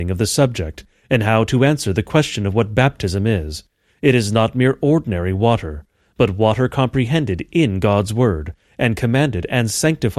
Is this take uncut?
yes; 0 cuts

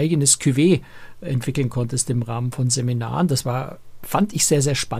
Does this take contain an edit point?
no; 0 cuts

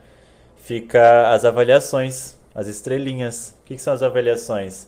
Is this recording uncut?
yes; 0 cuts

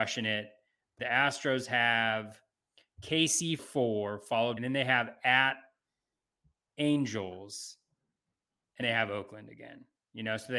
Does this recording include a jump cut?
yes; 4 cuts; at 1.0 s, 3.6 s, 4.6 s, 8.8 s

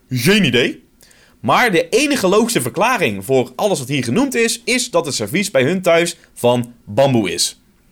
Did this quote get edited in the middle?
no; 0 cuts

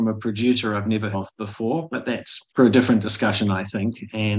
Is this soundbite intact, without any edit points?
no; 2 cuts; at 1.1 s, 2.5 s

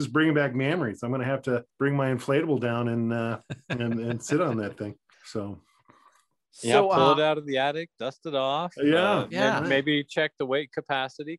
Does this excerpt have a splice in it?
yes; 2 cuts; at 1.7 s, 5.1 s

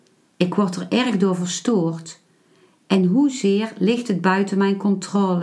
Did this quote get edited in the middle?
no; 0 cuts

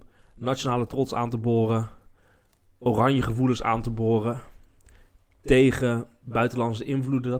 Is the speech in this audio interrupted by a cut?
no; 0 cuts

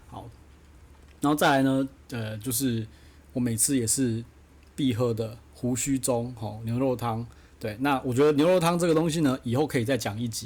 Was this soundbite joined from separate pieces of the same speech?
no; 0 cuts

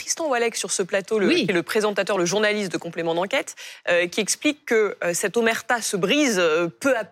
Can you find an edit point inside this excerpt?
no; 0 cuts

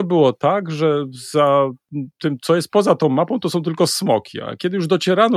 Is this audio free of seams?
yes; 0 cuts

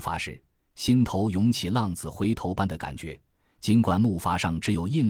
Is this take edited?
no; 0 cuts

